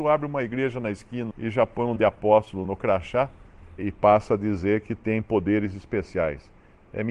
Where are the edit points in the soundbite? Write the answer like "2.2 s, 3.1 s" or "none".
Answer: 1.3 s, 2.0 s, 2.6 s, 3.8 s